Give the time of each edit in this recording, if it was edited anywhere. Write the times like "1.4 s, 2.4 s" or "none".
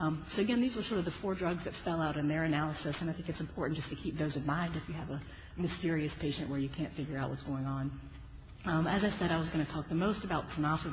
none